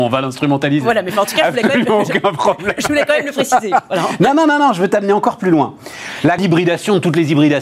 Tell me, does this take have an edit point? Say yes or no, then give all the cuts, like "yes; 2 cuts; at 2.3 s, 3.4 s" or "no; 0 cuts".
yes; 1 cut; at 6.4 s